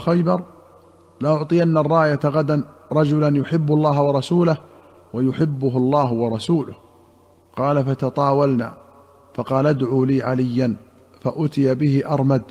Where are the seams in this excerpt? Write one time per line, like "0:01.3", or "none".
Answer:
none